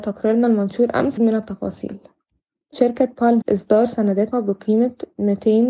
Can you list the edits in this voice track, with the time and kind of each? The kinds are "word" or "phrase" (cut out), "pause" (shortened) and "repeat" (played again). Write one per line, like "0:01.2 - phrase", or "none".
0:01.2 - word
0:02.7 - word
0:03.4 - word
0:04.3 - word